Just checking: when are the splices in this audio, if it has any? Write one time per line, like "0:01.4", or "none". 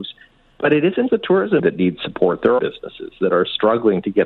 0:01.1
0:01.6
0:02.6